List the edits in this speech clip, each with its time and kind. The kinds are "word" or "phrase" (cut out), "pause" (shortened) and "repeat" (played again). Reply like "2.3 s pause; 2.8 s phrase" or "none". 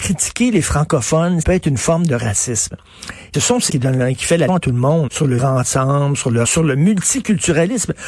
1.4 s word; 3.3 s word; 3.7 s word; 4.5 s word; 5.1 s word; 5.4 s word; 6.4 s word